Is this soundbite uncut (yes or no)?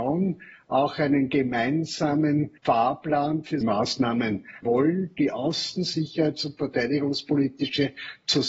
no